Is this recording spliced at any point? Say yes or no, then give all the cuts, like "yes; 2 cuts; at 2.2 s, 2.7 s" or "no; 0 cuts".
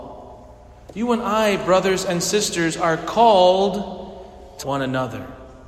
yes; 1 cut; at 4.6 s